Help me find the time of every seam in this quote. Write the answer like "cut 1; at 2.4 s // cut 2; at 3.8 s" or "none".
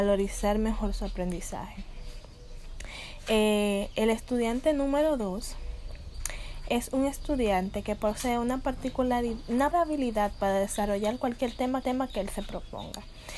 cut 1; at 6.7 s // cut 2; at 9.7 s // cut 3; at 11.8 s